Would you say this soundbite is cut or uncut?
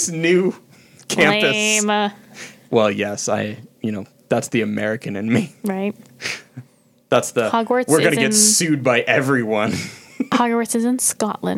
uncut